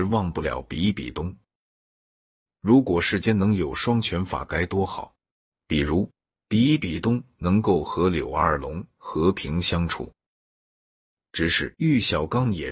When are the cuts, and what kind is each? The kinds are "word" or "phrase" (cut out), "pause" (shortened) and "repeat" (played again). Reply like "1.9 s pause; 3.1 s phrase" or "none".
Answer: 5.3 s pause; 11.7 s pause